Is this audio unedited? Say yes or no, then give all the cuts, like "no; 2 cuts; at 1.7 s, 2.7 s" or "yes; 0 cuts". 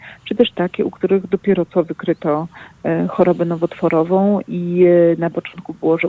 yes; 0 cuts